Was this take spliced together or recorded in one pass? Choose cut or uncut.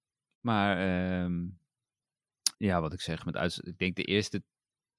cut